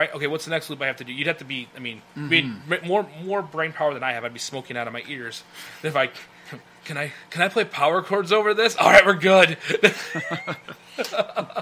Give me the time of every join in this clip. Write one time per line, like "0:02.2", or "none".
0:02.1